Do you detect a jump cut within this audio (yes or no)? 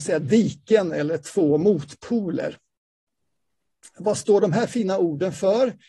no